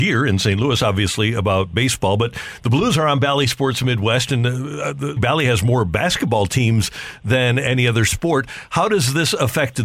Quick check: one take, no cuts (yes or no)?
no